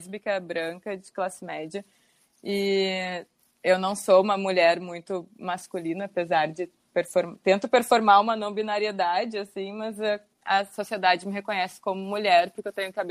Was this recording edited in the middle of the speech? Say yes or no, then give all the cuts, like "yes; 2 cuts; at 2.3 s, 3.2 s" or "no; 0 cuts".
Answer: no; 0 cuts